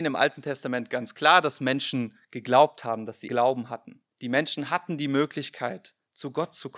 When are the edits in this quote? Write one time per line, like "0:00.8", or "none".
0:03.3
0:04.1